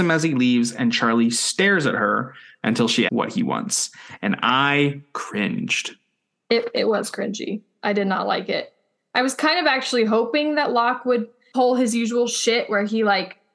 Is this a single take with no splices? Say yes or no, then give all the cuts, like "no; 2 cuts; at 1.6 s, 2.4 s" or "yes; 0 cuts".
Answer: no; 1 cut; at 3.1 s